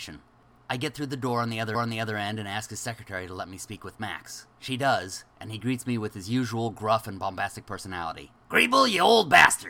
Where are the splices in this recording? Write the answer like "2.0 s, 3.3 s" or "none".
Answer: 1.7 s, 4.5 s, 8.4 s